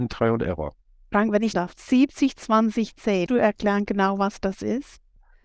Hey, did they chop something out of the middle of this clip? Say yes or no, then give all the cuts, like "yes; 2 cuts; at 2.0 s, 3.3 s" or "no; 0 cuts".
yes; 2 cuts; at 1.5 s, 3.3 s